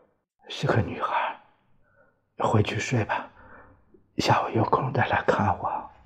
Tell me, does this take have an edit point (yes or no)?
no